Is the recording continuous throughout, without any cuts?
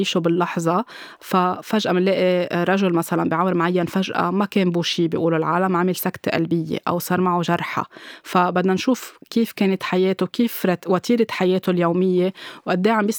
yes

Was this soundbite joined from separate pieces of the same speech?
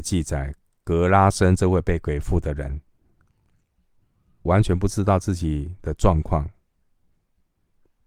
yes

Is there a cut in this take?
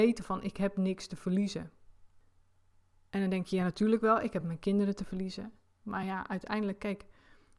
no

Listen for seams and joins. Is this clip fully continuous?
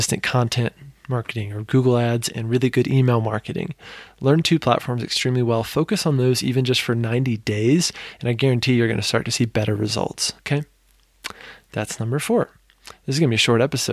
no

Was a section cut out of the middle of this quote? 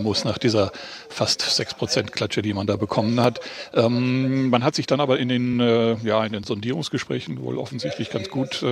no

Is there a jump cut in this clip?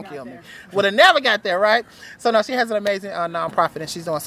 no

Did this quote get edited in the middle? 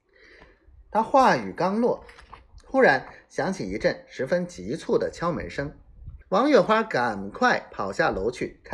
yes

